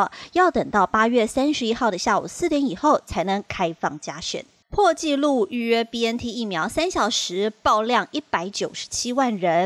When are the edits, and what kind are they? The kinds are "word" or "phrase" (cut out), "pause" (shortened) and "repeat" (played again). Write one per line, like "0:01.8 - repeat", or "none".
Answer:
0:04.6 - pause